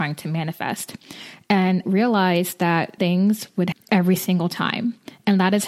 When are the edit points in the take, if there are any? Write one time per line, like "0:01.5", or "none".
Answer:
0:01.8
0:03.0
0:03.7